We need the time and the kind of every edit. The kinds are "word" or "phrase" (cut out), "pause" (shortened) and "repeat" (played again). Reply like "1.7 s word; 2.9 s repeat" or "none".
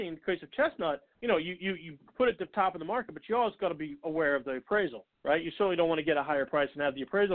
1.1 s pause; 5.1 s pause